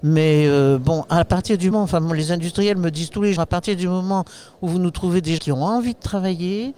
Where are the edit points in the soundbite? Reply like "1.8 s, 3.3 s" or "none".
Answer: 1.7 s, 3.4 s, 5.4 s